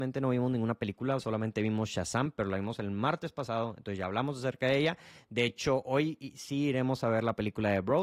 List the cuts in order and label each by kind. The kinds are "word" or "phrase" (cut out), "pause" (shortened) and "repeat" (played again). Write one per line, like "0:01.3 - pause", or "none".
none